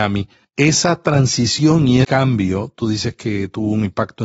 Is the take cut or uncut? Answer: cut